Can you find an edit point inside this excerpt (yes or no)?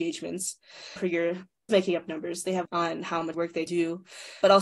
yes